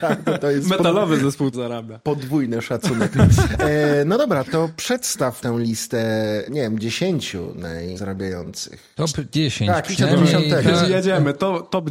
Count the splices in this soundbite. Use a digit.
6